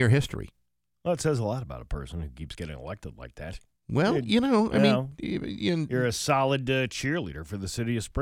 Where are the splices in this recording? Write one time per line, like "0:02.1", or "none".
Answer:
none